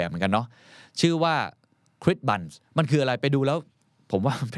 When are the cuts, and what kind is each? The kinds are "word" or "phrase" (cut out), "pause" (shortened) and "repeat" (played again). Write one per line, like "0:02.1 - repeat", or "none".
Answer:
0:02.7 - pause